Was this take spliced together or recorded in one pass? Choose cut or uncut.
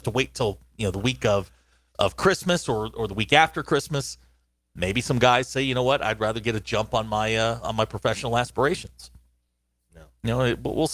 uncut